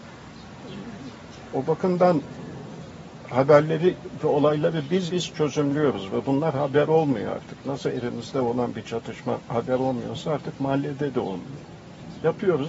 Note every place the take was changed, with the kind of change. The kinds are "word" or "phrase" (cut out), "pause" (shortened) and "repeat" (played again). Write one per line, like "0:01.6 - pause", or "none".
0:05.1 - word